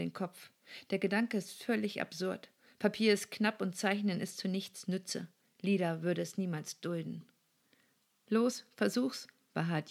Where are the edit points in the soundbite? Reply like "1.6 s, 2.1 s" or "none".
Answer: none